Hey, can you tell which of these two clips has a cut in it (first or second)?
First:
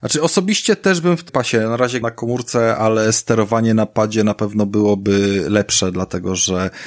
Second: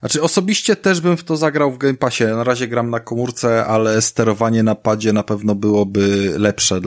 first